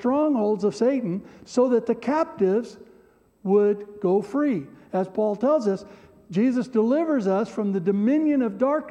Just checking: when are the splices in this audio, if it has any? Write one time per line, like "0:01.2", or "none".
none